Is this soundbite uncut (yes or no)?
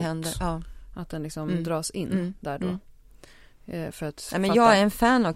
yes